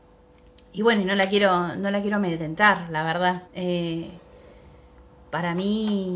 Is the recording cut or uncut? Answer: cut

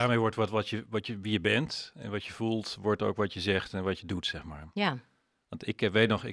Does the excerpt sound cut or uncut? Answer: uncut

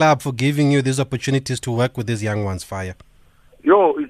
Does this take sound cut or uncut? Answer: uncut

